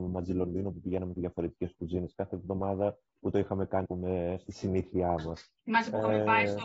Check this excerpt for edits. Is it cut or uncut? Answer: cut